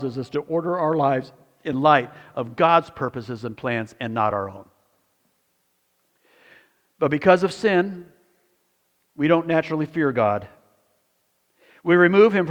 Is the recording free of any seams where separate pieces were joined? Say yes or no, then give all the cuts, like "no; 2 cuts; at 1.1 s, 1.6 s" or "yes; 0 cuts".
yes; 0 cuts